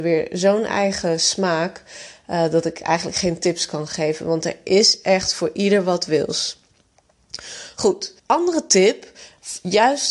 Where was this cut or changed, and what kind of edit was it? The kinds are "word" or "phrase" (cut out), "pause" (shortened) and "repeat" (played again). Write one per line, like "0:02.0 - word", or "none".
0:08.2 - pause